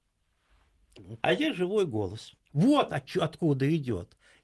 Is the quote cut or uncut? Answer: cut